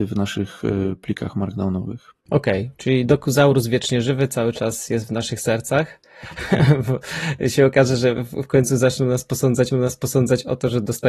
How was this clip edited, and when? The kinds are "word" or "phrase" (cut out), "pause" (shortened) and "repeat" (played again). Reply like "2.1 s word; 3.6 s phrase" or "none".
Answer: 2.2 s pause; 9.7 s repeat